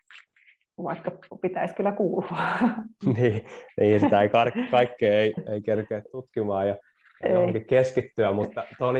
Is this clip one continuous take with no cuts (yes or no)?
yes